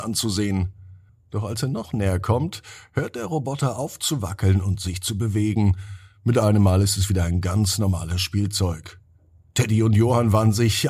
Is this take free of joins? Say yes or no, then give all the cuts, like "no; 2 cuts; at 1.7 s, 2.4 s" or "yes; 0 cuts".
no; 1 cut; at 1.1 s